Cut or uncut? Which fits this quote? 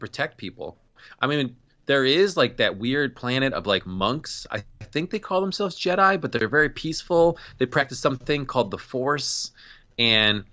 uncut